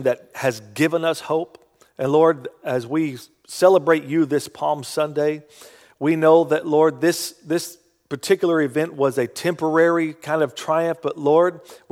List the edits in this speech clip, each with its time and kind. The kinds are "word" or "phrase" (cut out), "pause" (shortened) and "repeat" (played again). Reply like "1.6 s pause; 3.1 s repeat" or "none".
none